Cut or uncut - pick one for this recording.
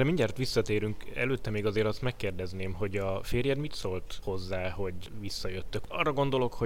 uncut